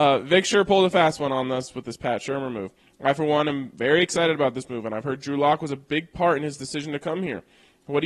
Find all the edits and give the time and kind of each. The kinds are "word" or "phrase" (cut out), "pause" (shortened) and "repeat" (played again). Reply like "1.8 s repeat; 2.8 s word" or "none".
none